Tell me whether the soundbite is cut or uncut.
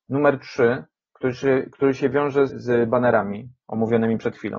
cut